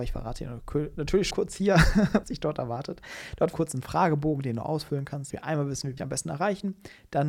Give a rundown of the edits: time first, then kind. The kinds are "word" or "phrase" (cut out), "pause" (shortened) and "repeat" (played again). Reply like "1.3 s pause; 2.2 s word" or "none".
1.3 s word; 2.2 s word; 3.5 s phrase; 5.3 s word; 6.0 s word